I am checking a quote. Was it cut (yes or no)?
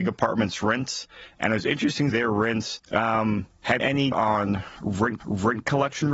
yes